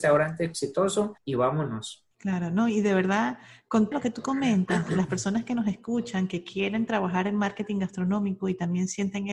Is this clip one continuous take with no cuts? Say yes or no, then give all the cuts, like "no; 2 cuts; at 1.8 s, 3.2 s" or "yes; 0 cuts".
no; 3 cuts; at 1.2 s, 2.1 s, 3.9 s